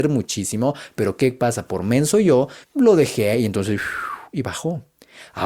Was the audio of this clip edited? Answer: yes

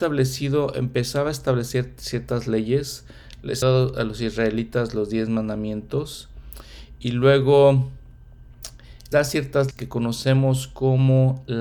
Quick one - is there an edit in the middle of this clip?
yes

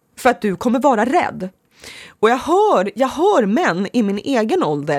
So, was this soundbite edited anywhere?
no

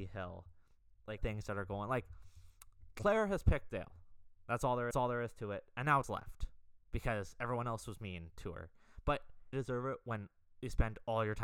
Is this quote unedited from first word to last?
no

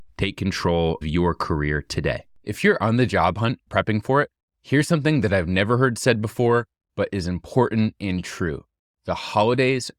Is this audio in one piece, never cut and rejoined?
no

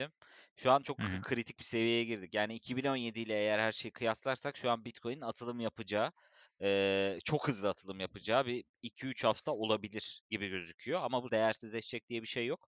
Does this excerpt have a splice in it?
yes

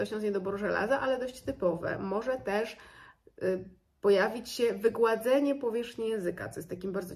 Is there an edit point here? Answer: no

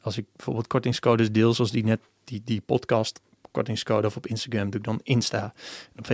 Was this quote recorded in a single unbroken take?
yes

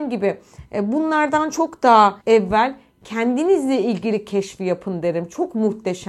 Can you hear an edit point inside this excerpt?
yes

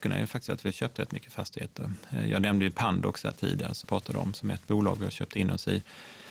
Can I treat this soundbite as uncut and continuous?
no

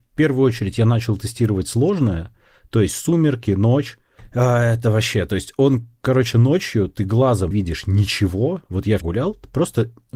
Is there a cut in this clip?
yes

